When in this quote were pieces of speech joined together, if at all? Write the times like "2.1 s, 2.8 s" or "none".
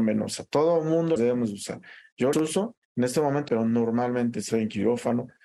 1.2 s, 2.3 s, 2.8 s, 3.5 s, 4.5 s